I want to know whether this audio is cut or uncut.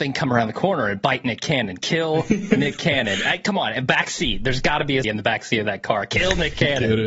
cut